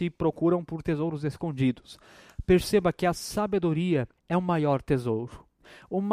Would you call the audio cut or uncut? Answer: cut